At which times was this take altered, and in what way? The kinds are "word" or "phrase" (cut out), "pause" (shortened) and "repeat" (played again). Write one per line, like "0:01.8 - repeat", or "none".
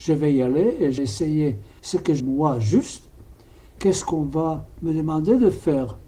0:01.0 - word
0:01.8 - phrase
0:02.2 - word
0:03.8 - phrase